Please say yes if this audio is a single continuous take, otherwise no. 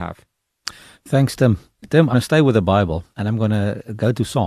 no